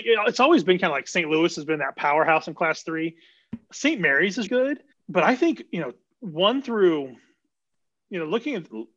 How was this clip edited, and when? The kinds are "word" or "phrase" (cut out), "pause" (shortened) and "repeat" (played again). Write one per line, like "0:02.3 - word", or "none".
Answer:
0:04.5 - word
0:04.9 - pause